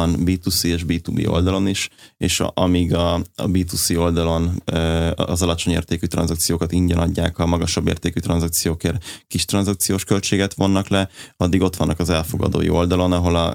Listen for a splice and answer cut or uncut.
uncut